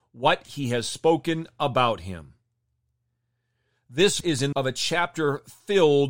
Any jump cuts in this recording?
yes; 2 cuts; at 4.2 s, 4.5 s

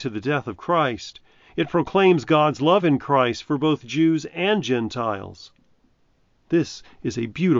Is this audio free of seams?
yes; 0 cuts

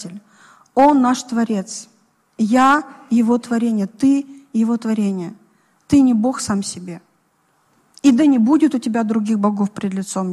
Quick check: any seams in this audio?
no; 0 cuts

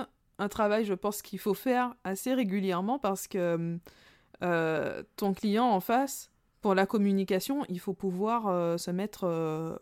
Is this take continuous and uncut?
yes; 0 cuts

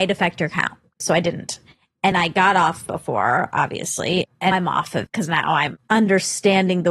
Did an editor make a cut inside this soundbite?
yes; 4 cuts; at 2.1 s, 2.9 s, 4.5 s, 5.1 s

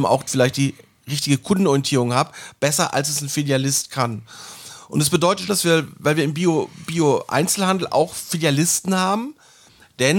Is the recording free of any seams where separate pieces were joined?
no; 1 cut; at 5.5 s

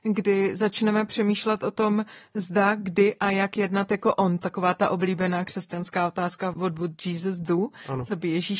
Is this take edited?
no; 0 cuts

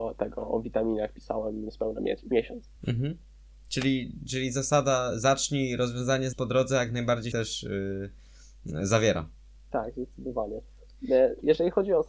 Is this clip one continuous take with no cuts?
no; 3 cuts; at 2.8 s, 6.3 s, 7.3 s

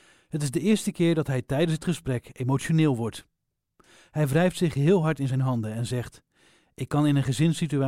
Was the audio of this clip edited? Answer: no; 0 cuts

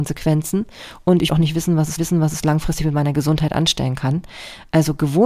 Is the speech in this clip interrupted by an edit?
yes; 2 cuts; at 1.3 s, 2.0 s

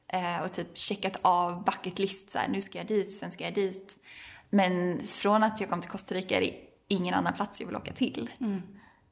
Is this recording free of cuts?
yes; 0 cuts

